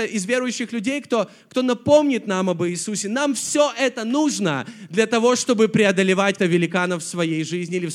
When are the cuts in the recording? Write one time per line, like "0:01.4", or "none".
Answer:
0:06.4